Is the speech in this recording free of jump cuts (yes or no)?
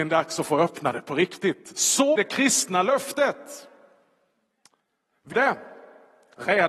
no